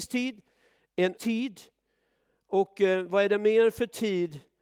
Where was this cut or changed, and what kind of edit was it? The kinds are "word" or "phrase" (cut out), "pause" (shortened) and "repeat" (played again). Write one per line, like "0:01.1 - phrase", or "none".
0:01.2 - word